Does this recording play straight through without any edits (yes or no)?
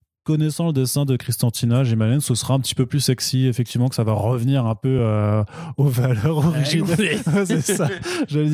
yes